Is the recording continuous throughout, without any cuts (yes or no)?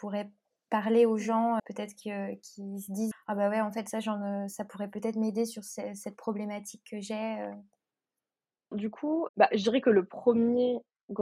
no